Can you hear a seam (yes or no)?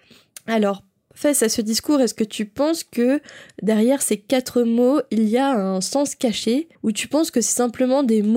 yes